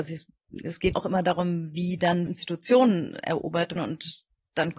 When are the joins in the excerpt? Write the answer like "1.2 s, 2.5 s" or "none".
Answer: 0.9 s, 2.3 s, 3.8 s